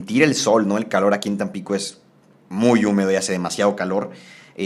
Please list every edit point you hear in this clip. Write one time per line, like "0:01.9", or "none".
none